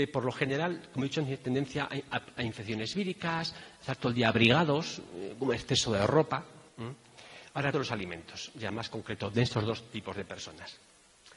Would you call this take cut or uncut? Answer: cut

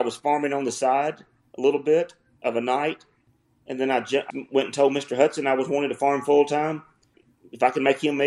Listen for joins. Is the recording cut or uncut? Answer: cut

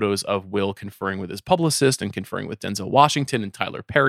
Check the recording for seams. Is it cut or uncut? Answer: uncut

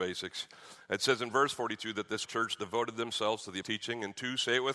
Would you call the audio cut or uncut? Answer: cut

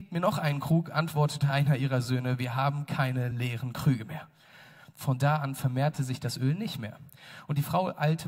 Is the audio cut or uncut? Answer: uncut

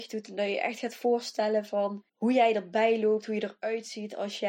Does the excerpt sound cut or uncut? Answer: cut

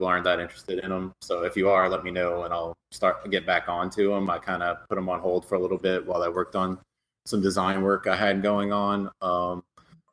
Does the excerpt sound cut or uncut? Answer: uncut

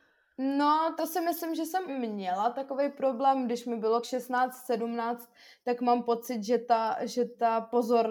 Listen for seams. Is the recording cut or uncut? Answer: cut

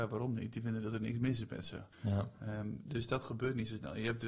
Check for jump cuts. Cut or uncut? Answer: cut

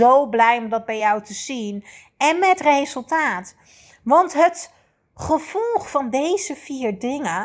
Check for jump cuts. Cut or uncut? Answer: uncut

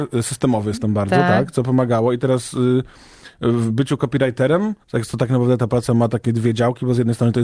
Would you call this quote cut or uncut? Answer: cut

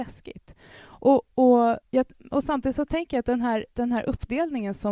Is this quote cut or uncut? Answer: cut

